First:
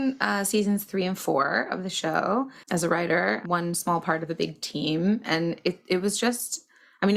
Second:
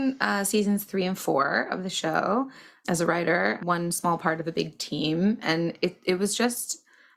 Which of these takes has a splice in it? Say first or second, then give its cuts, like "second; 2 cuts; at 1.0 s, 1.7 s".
first; 1 cut; at 2.6 s